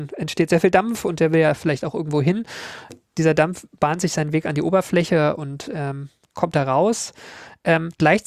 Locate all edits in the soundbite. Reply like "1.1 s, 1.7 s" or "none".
none